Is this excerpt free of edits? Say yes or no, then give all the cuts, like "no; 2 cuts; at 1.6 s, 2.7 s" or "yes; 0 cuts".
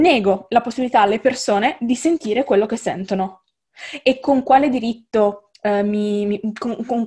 yes; 0 cuts